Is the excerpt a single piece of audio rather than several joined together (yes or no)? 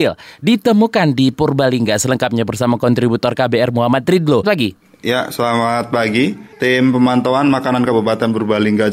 no